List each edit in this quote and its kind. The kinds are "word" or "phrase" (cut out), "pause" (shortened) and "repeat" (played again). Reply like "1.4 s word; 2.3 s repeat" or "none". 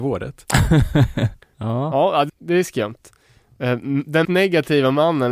2.3 s word; 4.2 s word

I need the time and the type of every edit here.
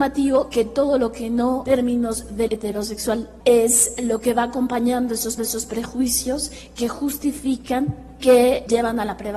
1.7 s phrase; 2.5 s word; 3.4 s pause; 5.4 s repeat; 8.2 s word

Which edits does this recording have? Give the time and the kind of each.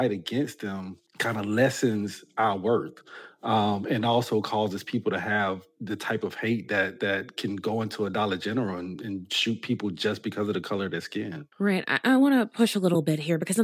1.1 s pause; 11.5 s pause

